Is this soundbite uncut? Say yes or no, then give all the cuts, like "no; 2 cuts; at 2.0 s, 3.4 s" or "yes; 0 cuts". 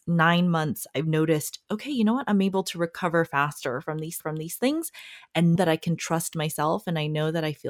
no; 2 cuts; at 4.2 s, 5.6 s